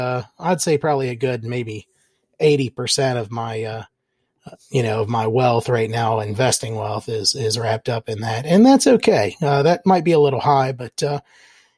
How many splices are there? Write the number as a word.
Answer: zero